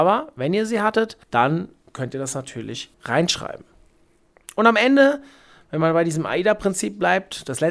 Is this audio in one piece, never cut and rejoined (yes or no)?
no